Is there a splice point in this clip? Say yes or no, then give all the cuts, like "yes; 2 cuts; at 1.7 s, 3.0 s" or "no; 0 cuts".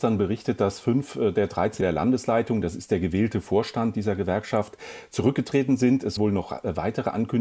yes; 2 cuts; at 1.8 s, 6.2 s